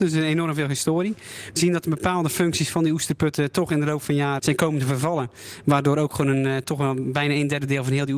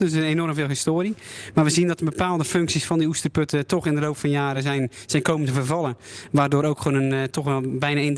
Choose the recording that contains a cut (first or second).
first